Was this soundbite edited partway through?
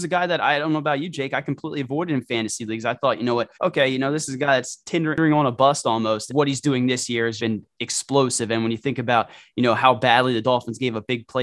yes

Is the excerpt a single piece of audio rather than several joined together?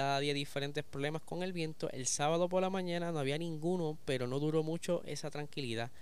yes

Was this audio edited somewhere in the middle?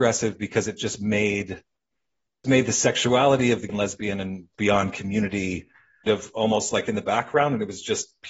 yes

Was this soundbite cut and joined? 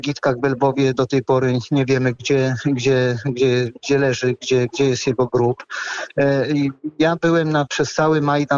no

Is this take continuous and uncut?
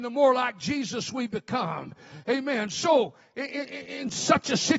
yes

